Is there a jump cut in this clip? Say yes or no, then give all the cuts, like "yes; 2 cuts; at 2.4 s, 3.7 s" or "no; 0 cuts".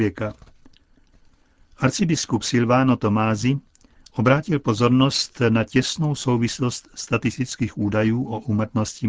no; 0 cuts